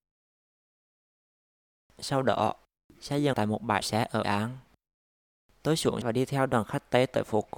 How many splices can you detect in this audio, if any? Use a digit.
4